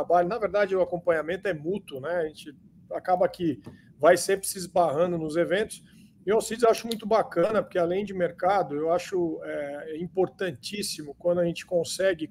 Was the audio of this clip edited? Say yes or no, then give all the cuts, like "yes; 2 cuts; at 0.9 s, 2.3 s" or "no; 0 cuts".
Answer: no; 0 cuts